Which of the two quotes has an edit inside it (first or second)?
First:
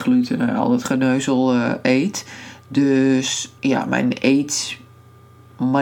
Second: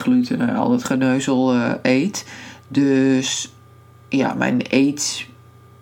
first